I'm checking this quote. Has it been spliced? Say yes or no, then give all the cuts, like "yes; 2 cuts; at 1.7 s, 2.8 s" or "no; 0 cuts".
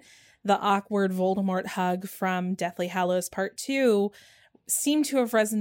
no; 0 cuts